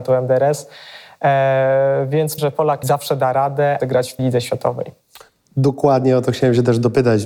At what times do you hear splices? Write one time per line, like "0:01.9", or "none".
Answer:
0:02.4
0:02.8
0:03.8
0:04.2